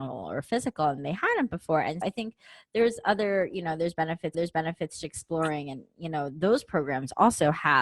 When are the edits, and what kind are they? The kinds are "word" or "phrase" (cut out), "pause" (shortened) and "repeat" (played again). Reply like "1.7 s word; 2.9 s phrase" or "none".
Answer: 2.0 s word; 4.3 s repeat